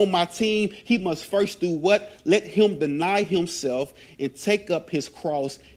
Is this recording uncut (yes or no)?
yes